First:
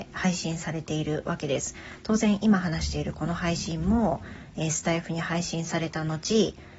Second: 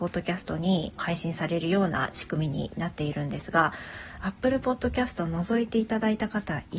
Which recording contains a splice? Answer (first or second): second